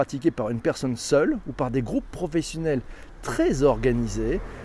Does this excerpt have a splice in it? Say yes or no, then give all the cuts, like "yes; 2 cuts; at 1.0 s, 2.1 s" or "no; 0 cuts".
no; 0 cuts